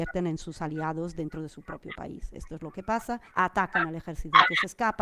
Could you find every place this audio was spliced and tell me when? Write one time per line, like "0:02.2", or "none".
0:03.3